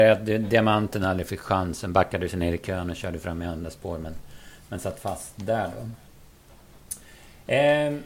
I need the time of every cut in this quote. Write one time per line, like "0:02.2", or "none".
none